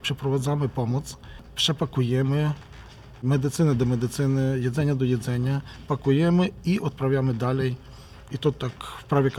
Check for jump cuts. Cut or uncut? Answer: uncut